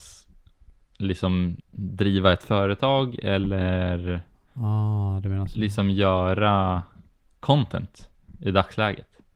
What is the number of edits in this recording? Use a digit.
1